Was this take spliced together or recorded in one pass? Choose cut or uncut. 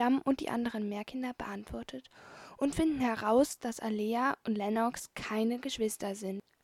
uncut